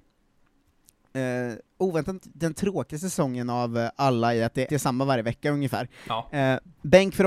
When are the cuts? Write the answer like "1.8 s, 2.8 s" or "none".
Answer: 2.2 s, 4.7 s